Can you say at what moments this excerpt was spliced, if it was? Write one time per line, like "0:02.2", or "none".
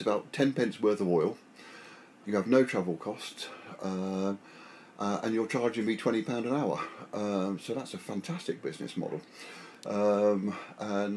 0:02.2